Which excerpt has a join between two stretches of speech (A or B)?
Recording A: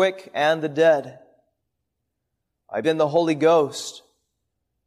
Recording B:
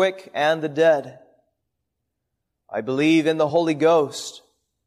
A